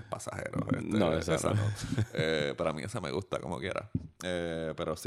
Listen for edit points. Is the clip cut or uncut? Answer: uncut